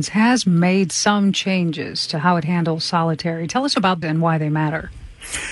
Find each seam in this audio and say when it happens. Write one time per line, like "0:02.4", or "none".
0:04.0